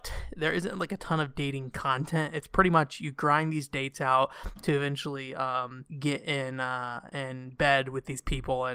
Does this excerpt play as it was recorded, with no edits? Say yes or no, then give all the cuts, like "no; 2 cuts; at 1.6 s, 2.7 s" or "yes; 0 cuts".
no; 1 cut; at 5.9 s